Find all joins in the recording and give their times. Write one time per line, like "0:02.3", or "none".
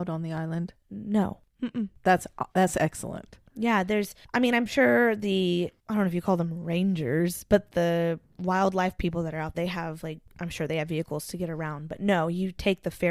0:02.5
0:09.0
0:09.5